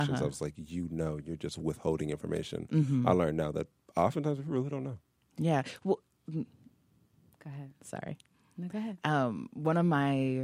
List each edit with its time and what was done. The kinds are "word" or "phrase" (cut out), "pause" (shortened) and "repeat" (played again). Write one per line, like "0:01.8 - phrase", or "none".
none